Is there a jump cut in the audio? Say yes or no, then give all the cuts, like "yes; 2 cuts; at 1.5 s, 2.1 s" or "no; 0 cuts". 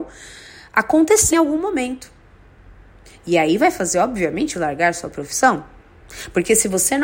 yes; 2 cuts; at 1.3 s, 4.5 s